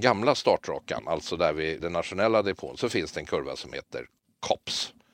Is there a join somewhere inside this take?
yes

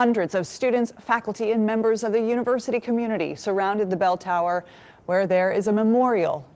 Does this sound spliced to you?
no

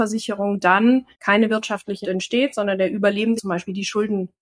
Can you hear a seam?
yes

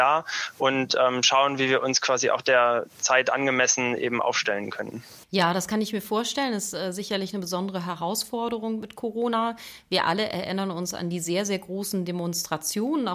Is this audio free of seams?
no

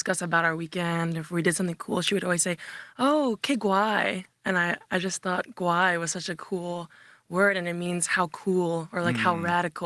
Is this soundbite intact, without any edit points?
yes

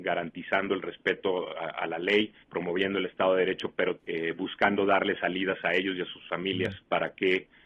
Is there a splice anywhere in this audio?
yes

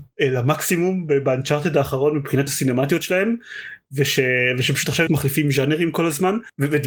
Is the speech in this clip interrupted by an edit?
yes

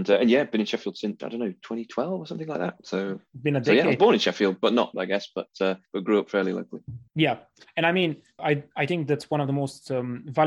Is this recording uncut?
no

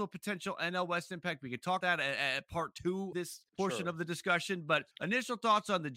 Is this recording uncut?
no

